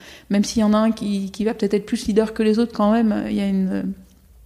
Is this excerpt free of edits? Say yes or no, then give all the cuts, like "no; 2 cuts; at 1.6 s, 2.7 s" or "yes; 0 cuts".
yes; 0 cuts